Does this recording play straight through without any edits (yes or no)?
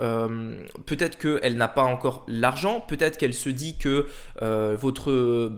yes